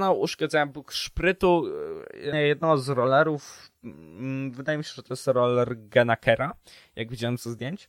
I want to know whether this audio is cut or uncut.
cut